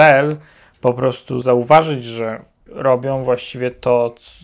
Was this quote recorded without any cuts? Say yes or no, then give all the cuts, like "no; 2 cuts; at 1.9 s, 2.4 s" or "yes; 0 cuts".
no; 2 cuts; at 1.4 s, 2.7 s